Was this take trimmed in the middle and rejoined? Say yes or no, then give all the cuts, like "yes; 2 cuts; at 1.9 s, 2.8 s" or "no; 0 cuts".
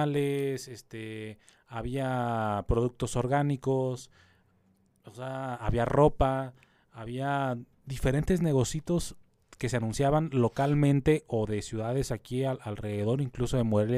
no; 0 cuts